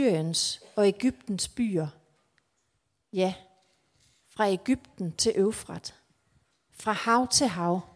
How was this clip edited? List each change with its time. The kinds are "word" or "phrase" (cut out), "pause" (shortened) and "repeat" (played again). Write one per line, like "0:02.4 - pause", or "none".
none